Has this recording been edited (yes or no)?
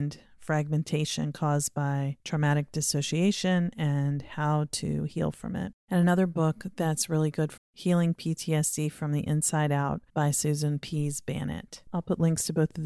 yes